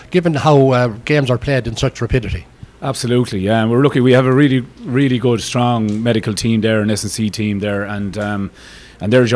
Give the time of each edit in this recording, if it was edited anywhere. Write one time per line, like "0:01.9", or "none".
none